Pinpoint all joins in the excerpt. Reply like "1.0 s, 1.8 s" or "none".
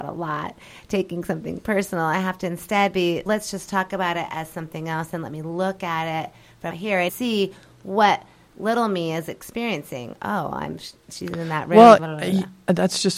3.3 s, 6.7 s, 7.1 s, 12.0 s